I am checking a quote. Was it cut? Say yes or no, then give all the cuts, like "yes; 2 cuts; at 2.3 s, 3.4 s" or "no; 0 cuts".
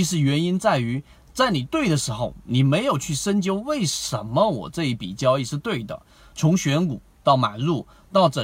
no; 0 cuts